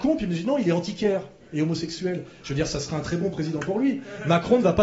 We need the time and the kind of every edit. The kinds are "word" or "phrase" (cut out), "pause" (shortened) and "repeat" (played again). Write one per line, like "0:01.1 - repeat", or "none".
none